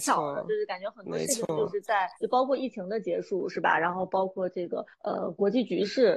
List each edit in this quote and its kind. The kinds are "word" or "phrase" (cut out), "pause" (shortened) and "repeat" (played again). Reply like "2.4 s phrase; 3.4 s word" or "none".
2.2 s pause; 4.9 s pause